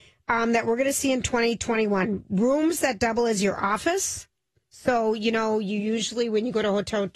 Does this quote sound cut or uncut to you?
uncut